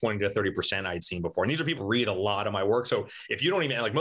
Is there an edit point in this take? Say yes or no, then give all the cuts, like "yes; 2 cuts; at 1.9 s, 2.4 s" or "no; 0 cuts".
yes; 1 cut; at 1.8 s